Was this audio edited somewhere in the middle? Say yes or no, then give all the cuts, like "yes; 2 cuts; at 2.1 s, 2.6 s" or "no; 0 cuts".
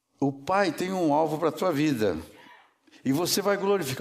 no; 0 cuts